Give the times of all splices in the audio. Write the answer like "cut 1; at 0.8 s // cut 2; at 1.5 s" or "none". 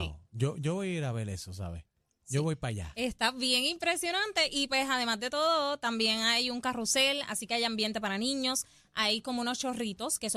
none